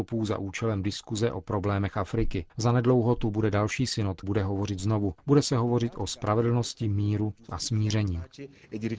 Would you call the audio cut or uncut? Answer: cut